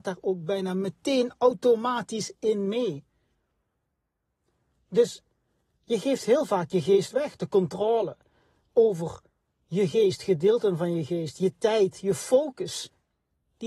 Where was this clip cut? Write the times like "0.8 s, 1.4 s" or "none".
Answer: none